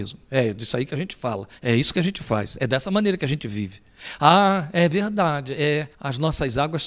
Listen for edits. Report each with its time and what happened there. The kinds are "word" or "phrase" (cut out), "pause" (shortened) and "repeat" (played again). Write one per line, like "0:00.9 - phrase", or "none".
0:01.5 - pause
0:05.9 - pause